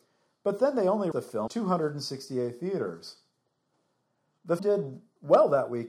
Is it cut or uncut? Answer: cut